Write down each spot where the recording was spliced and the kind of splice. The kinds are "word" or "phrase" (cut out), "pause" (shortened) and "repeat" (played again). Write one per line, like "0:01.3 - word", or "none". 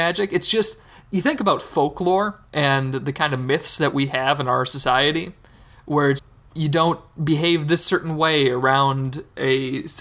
0:02.5 - pause
0:06.2 - word

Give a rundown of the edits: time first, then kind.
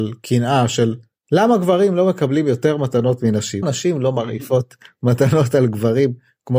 0:03.6 - word

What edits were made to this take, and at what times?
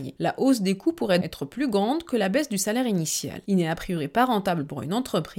0:01.2 - word

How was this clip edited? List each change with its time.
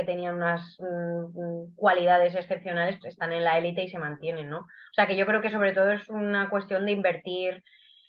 0:03.0 - word

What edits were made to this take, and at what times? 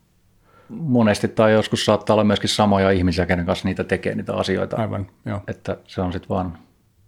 none

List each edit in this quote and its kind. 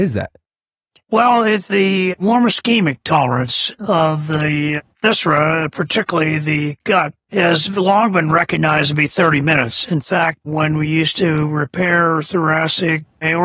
0:07.2 - pause

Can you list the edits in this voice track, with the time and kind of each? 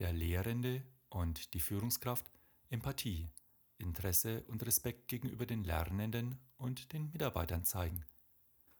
none

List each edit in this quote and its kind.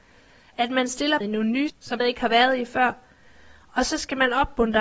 0:01.2 - word
0:01.7 - word
0:02.0 - word

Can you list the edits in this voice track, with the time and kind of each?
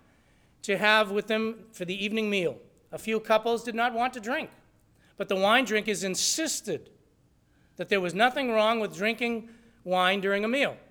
none

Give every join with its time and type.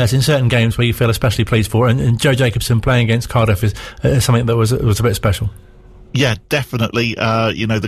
0:06.1 - pause

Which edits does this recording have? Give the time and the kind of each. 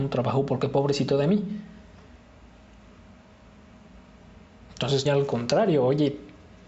0:05.1 - word

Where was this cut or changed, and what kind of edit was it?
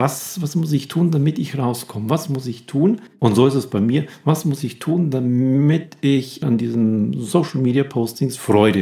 0:06.4 - word

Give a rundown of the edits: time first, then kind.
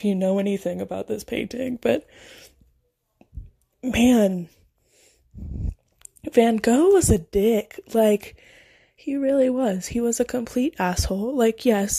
none

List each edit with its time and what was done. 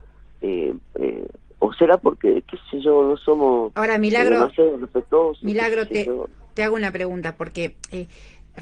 none

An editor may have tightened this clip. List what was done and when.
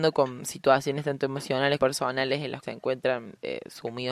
0:01.8 - word
0:02.6 - word

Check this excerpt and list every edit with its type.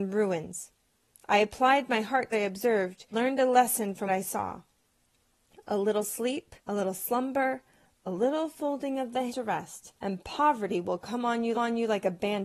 0:02.3 - phrase
0:03.1 - word
0:04.1 - word
0:06.6 - pause
0:09.3 - word
0:10.0 - pause
0:11.5 - repeat

